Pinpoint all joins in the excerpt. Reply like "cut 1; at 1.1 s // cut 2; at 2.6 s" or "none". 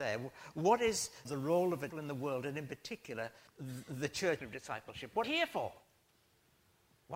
cut 1; at 1.3 s // cut 2; at 1.9 s // cut 3; at 3.5 s // cut 4; at 4.4 s // cut 5; at 5.2 s